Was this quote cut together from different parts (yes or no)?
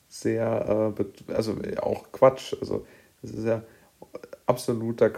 no